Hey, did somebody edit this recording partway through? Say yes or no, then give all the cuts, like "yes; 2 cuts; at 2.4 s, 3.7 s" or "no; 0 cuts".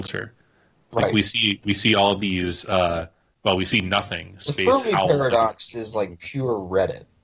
no; 0 cuts